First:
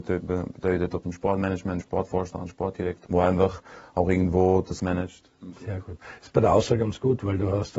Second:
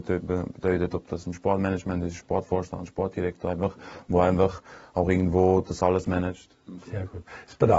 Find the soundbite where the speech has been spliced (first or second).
first